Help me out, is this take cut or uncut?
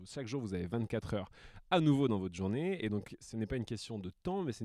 uncut